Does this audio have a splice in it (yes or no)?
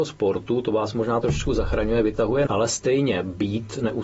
yes